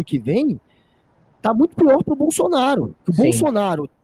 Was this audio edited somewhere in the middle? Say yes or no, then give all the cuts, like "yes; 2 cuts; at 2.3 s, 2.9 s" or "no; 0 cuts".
yes; 1 cut; at 3.0 s